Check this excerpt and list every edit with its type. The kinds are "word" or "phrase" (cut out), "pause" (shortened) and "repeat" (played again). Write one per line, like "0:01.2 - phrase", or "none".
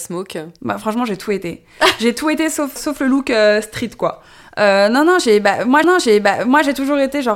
0:02.8 - word
0:05.8 - repeat